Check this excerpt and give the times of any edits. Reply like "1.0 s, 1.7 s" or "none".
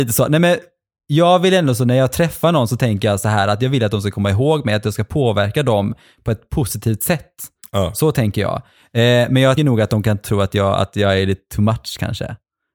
9.6 s